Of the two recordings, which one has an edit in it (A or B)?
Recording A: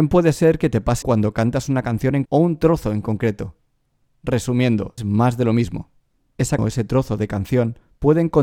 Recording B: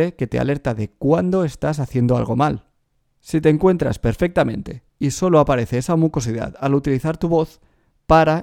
A